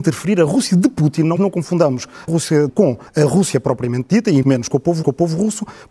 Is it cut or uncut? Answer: cut